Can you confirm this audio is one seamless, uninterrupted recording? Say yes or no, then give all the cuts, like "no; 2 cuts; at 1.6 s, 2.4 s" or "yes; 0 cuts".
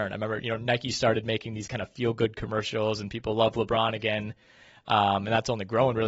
yes; 0 cuts